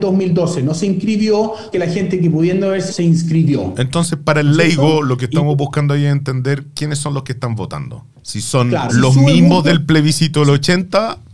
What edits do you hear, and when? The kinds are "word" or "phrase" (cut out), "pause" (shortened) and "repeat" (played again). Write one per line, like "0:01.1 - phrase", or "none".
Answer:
0:01.7 - phrase
0:02.9 - word
0:08.1 - pause
0:08.9 - word

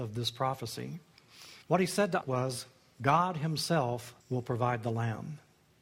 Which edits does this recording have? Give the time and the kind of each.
0:01.6 - pause
0:02.2 - word
0:04.2 - pause

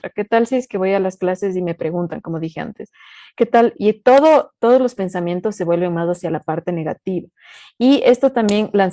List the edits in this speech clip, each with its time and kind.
none

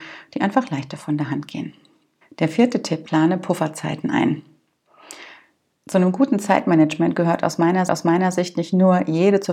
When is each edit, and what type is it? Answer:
0:02.2 - pause
0:03.0 - word
0:07.9 - repeat

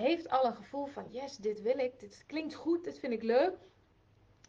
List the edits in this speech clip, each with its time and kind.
none

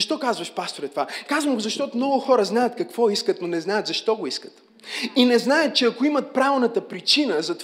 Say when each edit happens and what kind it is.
none

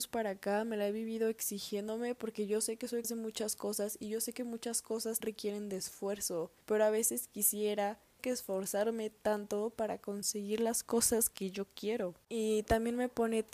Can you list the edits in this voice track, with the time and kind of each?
0:03.0 - word
0:05.2 - word
0:06.6 - pause
0:08.2 - phrase
0:12.2 - pause

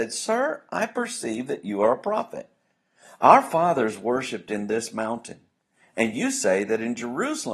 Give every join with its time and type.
none

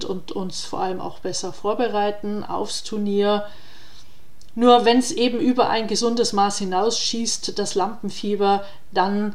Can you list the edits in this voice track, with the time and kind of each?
none

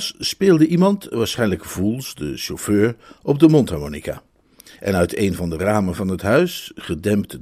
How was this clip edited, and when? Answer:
none

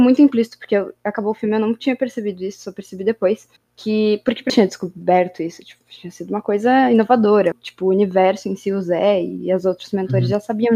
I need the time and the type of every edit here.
0:03.6 - pause
0:04.5 - phrase
0:07.5 - phrase

